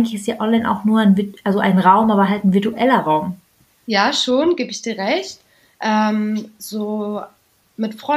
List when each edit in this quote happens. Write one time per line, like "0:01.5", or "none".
none